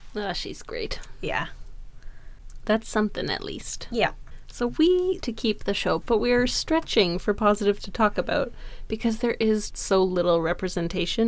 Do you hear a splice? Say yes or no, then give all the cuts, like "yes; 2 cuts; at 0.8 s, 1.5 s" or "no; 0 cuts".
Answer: yes; 4 cuts; at 5.2 s, 6.0 s, 7.8 s, 9.7 s